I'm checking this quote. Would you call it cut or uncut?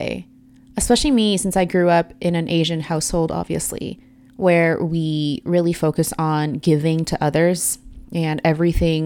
uncut